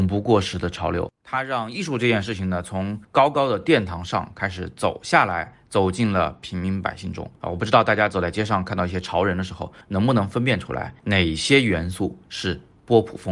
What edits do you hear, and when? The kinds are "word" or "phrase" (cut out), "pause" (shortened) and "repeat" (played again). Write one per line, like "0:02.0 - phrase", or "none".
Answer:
0:01.2 - pause
0:03.0 - pause
0:07.4 - pause
0:09.8 - pause
0:11.0 - pause